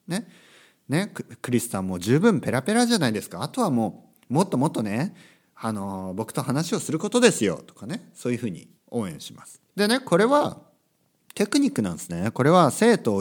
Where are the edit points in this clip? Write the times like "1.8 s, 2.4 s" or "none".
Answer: 8.8 s, 9.7 s